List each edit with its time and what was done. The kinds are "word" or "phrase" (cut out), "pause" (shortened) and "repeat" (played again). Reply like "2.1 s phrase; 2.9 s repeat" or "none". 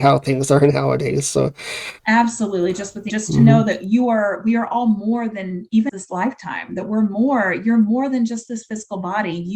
2.0 s pause; 3.1 s phrase; 5.9 s word